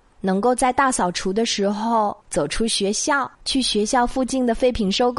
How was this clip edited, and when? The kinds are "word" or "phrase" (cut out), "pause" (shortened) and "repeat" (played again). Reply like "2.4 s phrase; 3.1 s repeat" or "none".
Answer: 2.2 s pause; 3.3 s pause